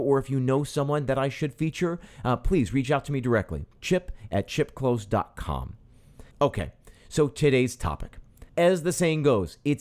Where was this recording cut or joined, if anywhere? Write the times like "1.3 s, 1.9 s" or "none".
6.3 s, 8.5 s